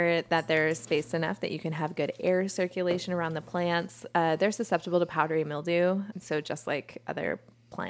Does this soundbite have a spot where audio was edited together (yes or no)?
no